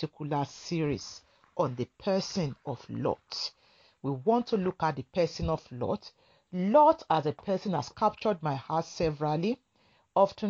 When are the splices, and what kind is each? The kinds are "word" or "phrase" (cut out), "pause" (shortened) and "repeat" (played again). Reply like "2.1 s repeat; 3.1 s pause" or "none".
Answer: none